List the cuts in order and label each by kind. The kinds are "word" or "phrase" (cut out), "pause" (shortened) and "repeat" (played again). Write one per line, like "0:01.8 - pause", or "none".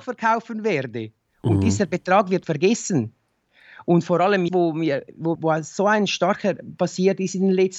0:02.4 - word
0:04.5 - word
0:05.4 - word
0:06.8 - word